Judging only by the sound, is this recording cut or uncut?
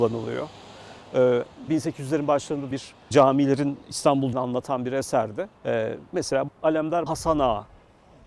cut